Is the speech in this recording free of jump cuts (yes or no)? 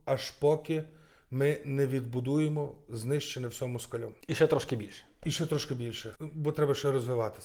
no